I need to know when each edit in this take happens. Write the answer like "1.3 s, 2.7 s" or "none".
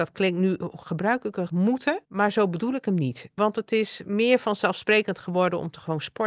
1.5 s, 2.0 s